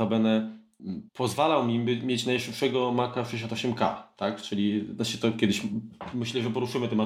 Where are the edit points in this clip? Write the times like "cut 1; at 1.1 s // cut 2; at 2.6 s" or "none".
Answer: cut 1; at 1.1 s